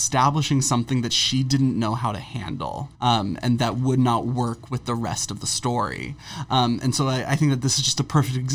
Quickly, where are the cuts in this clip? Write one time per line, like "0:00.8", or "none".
0:02.9
0:03.6